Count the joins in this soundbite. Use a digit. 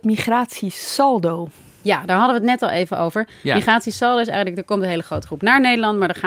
0